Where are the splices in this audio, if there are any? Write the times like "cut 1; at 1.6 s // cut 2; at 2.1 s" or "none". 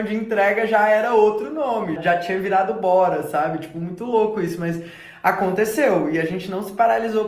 cut 1; at 2.0 s

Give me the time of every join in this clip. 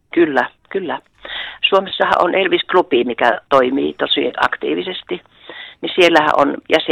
none

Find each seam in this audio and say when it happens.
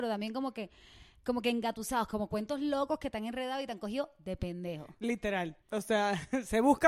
cut 1; at 5.6 s

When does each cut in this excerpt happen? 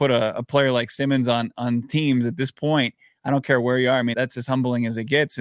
cut 1; at 4.1 s

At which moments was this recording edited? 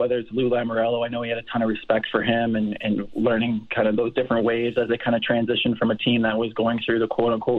none

